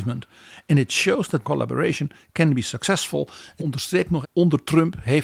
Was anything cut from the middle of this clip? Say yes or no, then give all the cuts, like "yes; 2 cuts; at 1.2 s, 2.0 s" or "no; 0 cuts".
yes; 3 cuts; at 1.4 s, 3.6 s, 4.2 s